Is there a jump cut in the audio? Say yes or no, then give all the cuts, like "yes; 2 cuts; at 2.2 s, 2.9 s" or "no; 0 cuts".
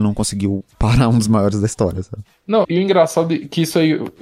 yes; 1 cut; at 2.6 s